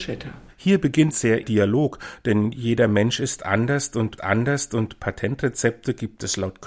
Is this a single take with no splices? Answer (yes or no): no